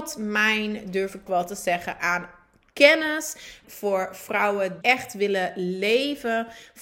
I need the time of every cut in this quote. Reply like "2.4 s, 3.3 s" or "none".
1.3 s, 3.6 s, 4.8 s